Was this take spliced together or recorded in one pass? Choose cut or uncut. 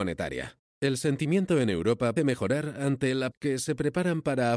cut